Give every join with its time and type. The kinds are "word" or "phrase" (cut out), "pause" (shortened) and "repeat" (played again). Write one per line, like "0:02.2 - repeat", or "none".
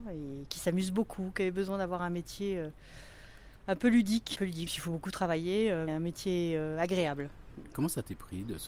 0:04.4 - word
0:04.7 - word
0:05.9 - word